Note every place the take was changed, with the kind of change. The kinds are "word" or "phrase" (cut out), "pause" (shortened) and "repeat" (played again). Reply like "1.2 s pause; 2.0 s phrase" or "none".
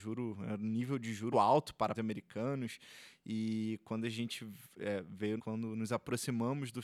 1.3 s word; 1.9 s word; 5.4 s word